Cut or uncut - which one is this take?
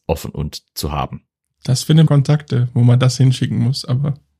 cut